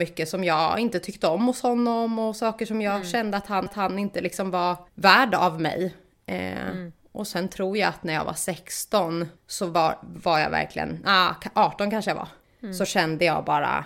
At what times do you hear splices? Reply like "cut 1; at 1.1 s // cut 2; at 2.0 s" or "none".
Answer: cut 1; at 3.7 s // cut 2; at 4.9 s // cut 3; at 9.4 s // cut 4; at 12.4 s